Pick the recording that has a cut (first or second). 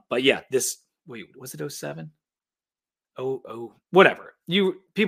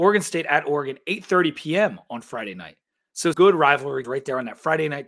second